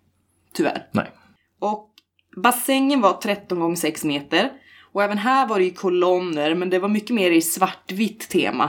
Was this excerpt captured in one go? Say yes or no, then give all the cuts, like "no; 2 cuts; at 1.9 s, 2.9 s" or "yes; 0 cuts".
no; 1 cut; at 1.4 s